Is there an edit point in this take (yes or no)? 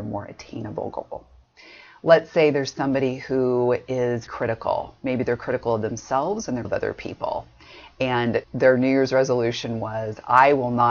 yes